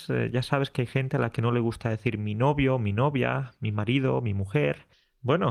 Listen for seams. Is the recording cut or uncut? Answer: uncut